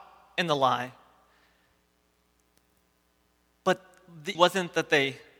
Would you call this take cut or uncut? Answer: cut